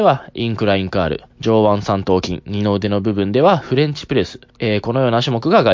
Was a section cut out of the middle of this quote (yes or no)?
yes